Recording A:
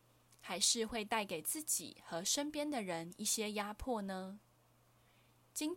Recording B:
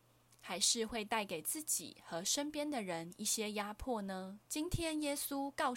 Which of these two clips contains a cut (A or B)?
B